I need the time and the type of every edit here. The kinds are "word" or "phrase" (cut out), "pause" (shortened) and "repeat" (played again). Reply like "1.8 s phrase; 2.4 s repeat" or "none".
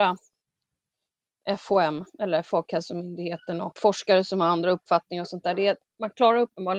3.8 s word